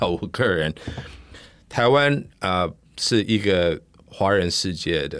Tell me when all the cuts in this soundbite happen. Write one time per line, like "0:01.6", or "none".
none